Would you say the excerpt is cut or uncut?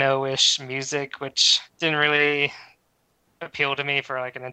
cut